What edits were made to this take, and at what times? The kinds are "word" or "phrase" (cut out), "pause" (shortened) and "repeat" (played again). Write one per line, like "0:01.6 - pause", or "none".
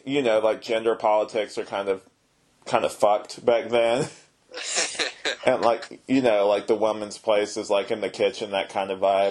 none